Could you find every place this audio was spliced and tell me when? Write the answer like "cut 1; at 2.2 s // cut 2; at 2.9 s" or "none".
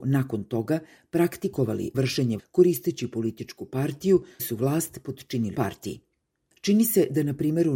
cut 1; at 1.9 s // cut 2; at 2.4 s // cut 3; at 4.4 s // cut 4; at 5.5 s